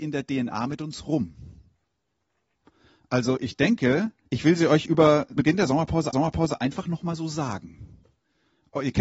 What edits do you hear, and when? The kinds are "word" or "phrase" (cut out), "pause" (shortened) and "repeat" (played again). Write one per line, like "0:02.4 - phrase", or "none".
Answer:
0:04.3 - pause
0:05.4 - word
0:06.1 - repeat